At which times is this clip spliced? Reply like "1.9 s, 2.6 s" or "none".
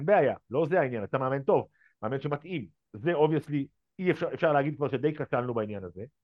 none